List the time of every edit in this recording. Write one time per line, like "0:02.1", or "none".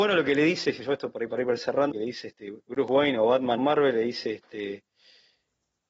0:01.9
0:02.6
0:03.6